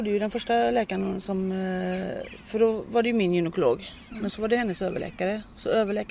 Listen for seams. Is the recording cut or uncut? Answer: uncut